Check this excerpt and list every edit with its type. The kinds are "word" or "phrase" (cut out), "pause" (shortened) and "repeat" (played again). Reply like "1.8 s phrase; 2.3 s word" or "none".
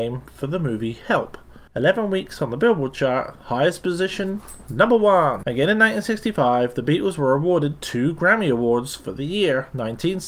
1.7 s pause